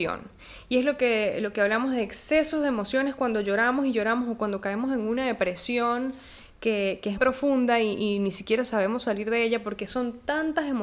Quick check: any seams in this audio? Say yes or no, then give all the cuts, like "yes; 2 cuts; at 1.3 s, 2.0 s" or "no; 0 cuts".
yes; 1 cut; at 7.2 s